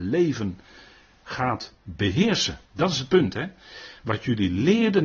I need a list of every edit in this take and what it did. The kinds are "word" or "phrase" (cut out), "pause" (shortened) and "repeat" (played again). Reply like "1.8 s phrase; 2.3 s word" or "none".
2.7 s pause